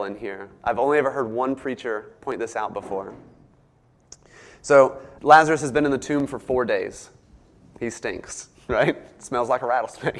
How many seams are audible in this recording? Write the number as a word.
one